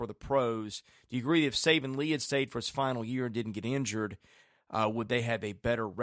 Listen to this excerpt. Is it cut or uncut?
uncut